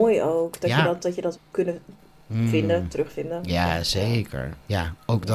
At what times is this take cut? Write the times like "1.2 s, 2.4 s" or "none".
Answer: 1.3 s

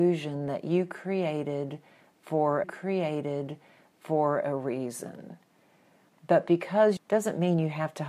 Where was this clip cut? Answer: 2.6 s, 7.0 s

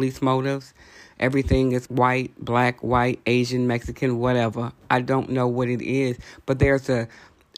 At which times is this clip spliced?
1.9 s

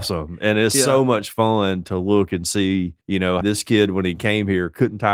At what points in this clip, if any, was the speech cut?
3.0 s, 3.4 s

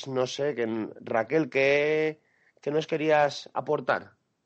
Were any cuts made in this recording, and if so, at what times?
none

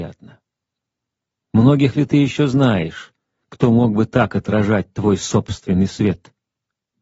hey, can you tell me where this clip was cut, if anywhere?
none

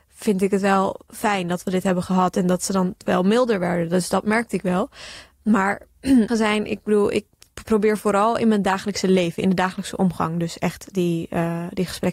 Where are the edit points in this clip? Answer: 6.3 s

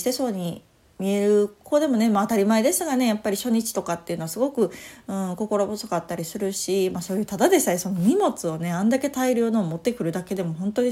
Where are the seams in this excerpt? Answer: none

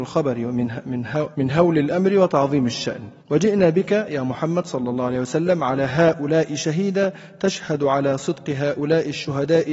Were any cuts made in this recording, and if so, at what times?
1.3 s, 3.2 s

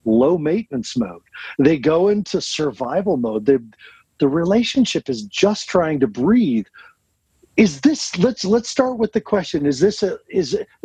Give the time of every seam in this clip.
none

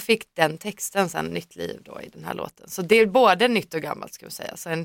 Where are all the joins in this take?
none

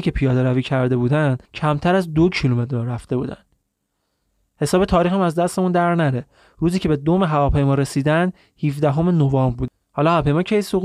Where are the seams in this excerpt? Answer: 1.5 s

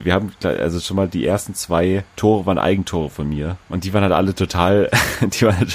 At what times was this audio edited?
2.1 s, 3.6 s

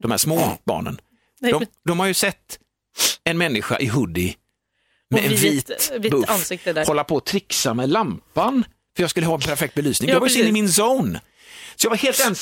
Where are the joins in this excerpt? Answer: none

